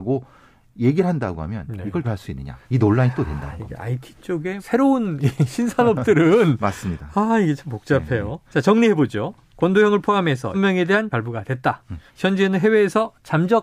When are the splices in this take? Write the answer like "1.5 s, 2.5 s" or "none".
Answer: 2.0 s, 2.6 s, 4.6 s, 8.5 s, 10.5 s, 11.1 s, 12.1 s